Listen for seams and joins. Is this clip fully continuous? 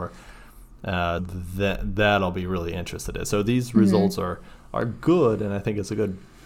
no; 1 cut; at 1.2 s

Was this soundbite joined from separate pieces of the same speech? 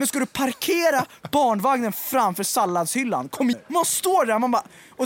yes; 1 cut; at 3.5 s

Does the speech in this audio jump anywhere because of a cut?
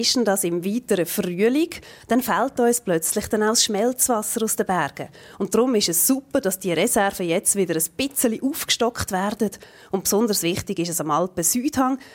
no; 0 cuts

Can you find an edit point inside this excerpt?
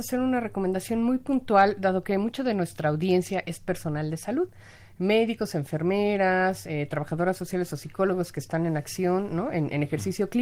no; 0 cuts

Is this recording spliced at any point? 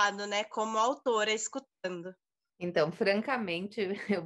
no; 0 cuts

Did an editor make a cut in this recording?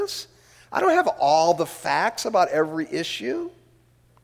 no; 0 cuts

